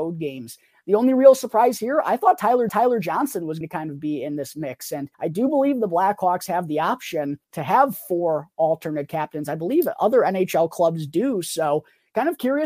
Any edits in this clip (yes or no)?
yes